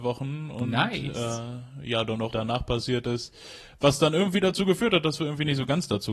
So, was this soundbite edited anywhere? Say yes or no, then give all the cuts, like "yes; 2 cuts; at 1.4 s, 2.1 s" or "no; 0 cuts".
yes; 1 cut; at 2.3 s